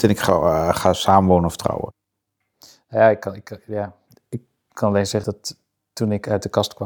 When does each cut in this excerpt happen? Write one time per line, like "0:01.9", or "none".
0:05.2